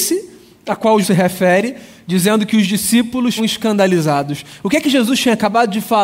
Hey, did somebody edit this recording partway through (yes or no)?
yes